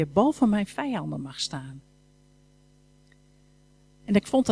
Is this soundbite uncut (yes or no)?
yes